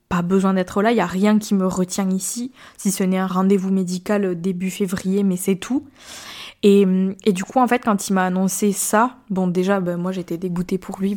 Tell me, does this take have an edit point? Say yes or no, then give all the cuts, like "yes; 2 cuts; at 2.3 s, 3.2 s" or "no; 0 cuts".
no; 0 cuts